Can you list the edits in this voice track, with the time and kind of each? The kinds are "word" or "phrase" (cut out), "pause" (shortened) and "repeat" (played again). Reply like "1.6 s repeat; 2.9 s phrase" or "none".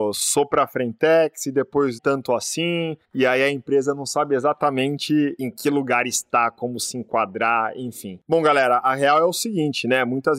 2.0 s word; 3.0 s pause